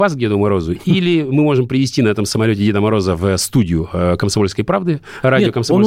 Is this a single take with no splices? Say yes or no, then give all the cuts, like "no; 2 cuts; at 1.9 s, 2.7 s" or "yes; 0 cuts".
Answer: yes; 0 cuts